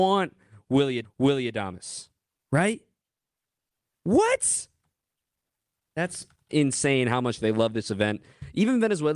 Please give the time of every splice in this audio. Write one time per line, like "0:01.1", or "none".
0:01.0
0:06.5